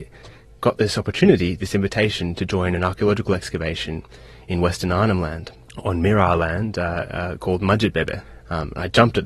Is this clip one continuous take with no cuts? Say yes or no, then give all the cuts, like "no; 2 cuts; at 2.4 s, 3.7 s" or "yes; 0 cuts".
yes; 0 cuts